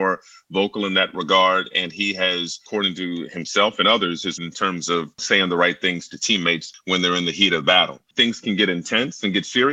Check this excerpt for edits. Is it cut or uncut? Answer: cut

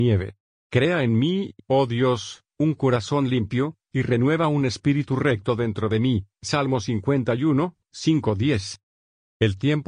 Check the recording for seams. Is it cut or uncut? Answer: uncut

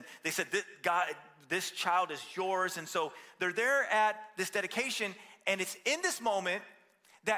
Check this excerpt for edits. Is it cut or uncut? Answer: uncut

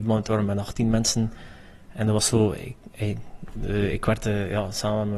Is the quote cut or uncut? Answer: uncut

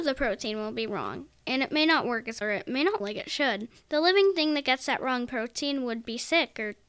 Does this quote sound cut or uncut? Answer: cut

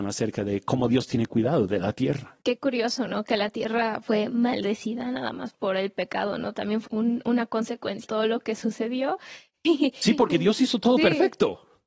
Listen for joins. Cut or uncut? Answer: cut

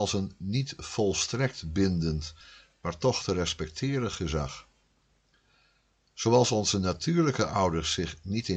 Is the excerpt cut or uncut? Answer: uncut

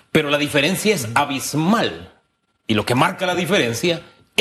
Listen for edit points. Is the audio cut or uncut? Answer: uncut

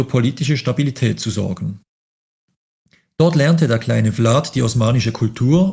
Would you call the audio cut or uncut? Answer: uncut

